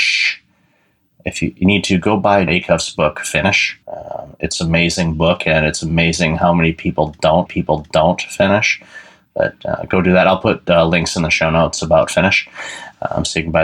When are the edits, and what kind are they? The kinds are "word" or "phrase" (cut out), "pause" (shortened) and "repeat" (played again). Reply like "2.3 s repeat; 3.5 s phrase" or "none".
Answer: 2.5 s word; 3.8 s pause; 7.5 s repeat